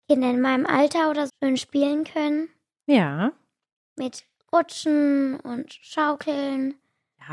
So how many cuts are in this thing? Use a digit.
1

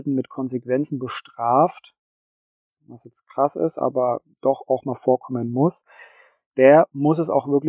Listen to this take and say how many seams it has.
0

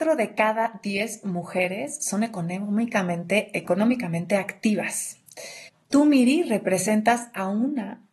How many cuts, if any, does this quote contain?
1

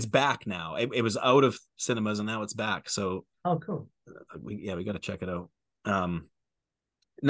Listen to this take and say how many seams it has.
1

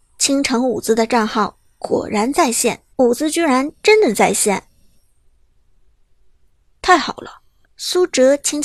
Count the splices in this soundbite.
2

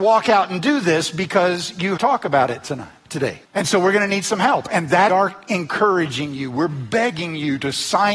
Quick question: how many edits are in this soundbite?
3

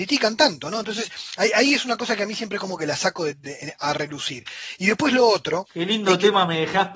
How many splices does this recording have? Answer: 0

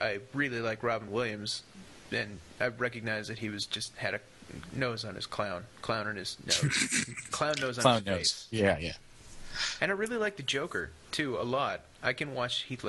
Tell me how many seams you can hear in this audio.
0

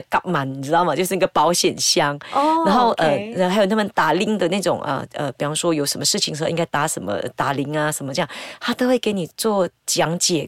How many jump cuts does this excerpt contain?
0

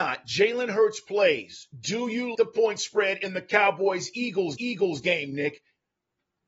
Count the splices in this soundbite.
2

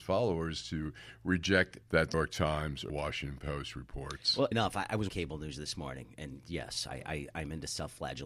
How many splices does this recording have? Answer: 5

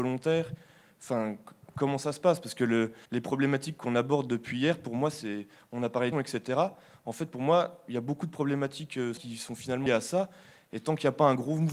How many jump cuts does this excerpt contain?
4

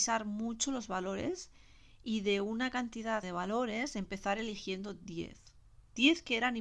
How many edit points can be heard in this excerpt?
1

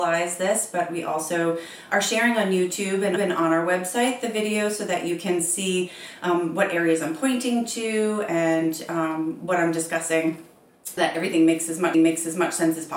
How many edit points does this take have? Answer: 3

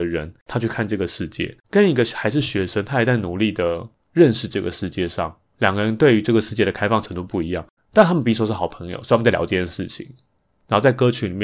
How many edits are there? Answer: 2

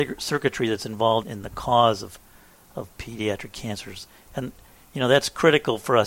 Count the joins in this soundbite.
1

